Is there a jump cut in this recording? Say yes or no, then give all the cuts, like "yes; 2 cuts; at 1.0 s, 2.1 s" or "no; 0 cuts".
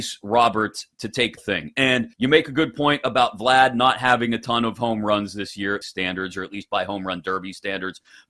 yes; 3 cuts; at 1.4 s, 2.1 s, 5.8 s